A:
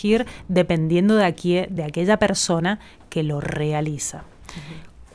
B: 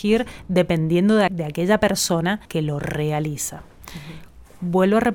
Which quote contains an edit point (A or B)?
B